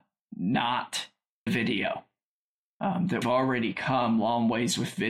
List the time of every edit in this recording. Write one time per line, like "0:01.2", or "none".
0:01.5
0:03.2